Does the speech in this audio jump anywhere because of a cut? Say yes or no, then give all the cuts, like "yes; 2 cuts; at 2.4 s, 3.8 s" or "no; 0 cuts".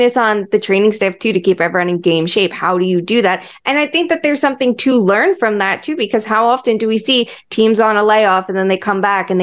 no; 0 cuts